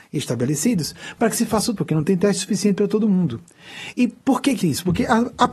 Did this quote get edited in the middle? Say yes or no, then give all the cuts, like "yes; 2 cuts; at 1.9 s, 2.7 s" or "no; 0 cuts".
yes; 2 cuts; at 1.8 s, 4.6 s